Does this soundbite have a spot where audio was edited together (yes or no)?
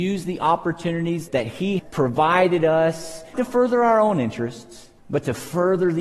yes